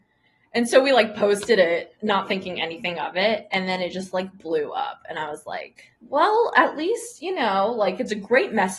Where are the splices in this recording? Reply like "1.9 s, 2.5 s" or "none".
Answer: 5.9 s